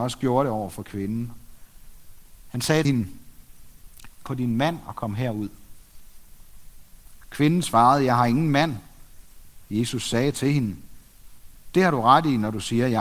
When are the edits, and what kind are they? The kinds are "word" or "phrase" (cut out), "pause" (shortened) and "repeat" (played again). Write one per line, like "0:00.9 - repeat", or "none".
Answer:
0:02.8 - word
0:04.3 - phrase